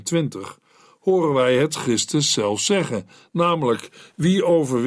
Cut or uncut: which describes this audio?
uncut